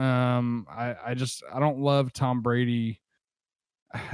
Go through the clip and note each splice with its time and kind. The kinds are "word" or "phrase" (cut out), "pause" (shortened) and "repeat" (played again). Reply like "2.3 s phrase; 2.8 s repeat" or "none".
none